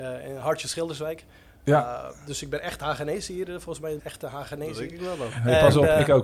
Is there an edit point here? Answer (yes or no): yes